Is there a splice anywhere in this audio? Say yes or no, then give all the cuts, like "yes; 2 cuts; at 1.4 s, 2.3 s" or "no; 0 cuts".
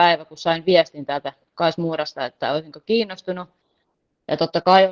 no; 0 cuts